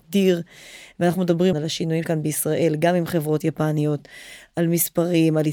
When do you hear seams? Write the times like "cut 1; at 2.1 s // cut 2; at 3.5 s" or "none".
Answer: cut 1; at 1.5 s // cut 2; at 2.0 s